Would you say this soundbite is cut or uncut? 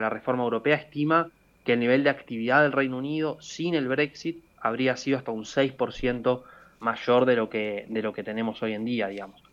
uncut